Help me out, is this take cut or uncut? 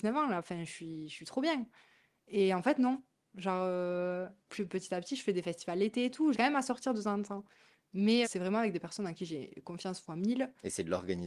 cut